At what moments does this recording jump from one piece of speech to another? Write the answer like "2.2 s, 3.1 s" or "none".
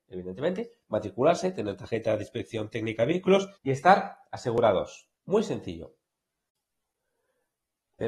3.6 s, 5.2 s